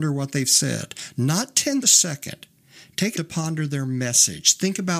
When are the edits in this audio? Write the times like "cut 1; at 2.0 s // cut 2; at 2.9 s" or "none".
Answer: cut 1; at 1.8 s // cut 2; at 3.1 s